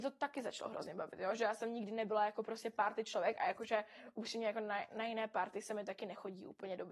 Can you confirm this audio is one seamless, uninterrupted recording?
yes; 0 cuts

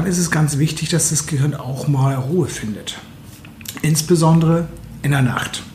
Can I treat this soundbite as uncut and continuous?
yes; 0 cuts

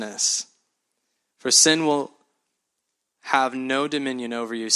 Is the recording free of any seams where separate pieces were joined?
yes; 0 cuts

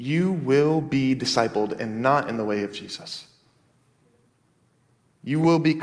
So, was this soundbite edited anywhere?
no; 0 cuts

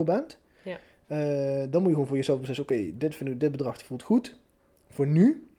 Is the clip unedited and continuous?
yes; 0 cuts

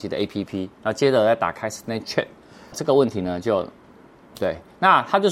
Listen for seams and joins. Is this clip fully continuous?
no; 1 cut; at 2.7 s

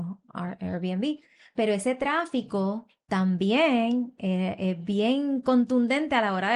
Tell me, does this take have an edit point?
no; 0 cuts

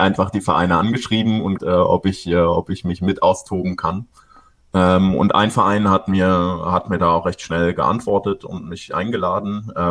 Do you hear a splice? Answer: yes; 1 cut; at 1.6 s

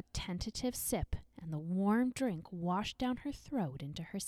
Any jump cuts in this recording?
no; 0 cuts

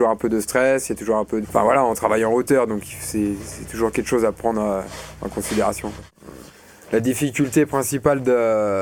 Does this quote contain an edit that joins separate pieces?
yes; 1 cut; at 1.4 s

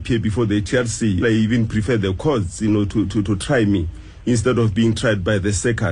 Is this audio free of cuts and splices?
no; 1 cut; at 1.2 s

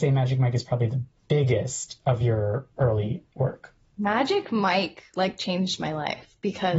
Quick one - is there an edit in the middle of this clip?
no; 0 cuts

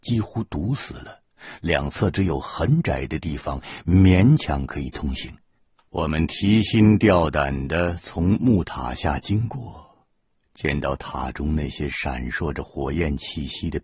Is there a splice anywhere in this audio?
yes; 1 cut; at 5.6 s

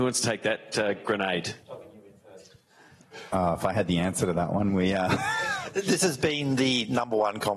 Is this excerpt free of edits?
yes; 0 cuts

